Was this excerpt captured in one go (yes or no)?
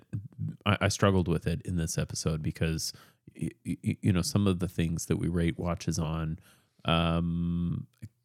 yes